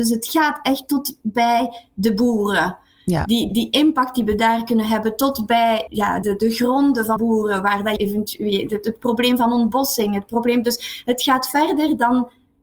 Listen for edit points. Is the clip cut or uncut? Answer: cut